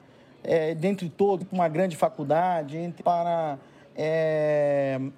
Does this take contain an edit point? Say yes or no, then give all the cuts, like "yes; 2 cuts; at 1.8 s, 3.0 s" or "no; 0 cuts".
yes; 2 cuts; at 1.4 s, 3.0 s